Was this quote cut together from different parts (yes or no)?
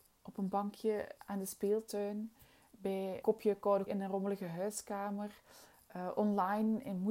yes